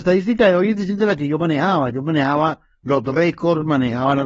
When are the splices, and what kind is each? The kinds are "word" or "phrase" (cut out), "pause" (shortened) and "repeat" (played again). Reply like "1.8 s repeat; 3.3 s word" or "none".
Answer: none